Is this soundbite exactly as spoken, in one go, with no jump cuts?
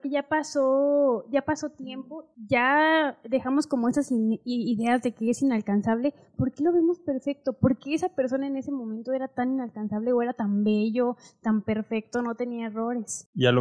yes; 0 cuts

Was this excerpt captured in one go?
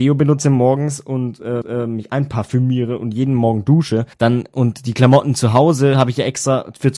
no; 2 cuts; at 1.6 s, 4.1 s

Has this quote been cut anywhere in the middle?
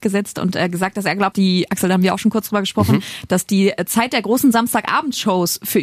yes; 1 cut; at 1.3 s

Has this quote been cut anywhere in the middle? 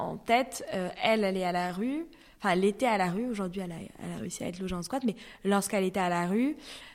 no; 0 cuts

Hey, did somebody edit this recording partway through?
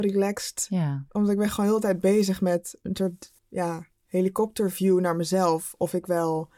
yes; 2 cuts; at 1.1 s, 3.4 s

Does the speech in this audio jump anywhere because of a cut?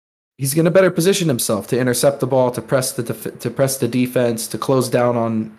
no; 0 cuts

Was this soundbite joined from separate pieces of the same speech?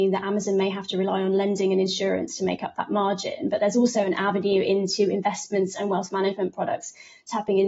no; 0 cuts

